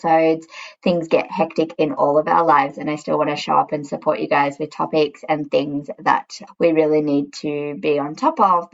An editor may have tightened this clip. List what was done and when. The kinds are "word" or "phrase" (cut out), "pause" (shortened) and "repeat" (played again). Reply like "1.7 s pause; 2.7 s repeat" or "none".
none